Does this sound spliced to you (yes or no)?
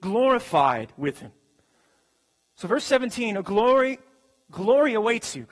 no